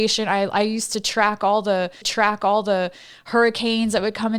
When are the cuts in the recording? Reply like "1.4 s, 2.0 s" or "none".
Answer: 2.0 s